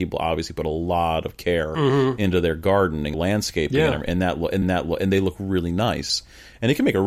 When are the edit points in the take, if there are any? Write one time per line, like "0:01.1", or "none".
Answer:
0:03.1
0:04.6